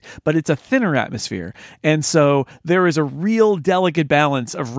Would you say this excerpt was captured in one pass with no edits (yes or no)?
yes